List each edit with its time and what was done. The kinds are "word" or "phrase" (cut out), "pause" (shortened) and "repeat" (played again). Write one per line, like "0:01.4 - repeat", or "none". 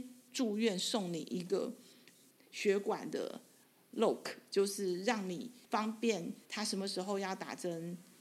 0:05.6 - pause
0:06.4 - pause